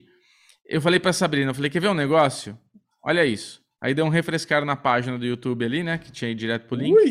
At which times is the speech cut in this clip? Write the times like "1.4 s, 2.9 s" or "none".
none